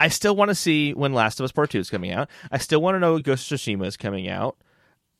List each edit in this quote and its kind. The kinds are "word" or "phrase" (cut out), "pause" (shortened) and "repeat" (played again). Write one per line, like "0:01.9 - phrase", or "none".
none